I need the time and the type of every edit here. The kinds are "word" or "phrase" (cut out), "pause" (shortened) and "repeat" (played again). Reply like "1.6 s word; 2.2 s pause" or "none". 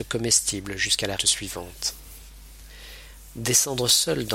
1.2 s word